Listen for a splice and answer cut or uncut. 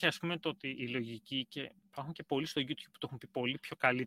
cut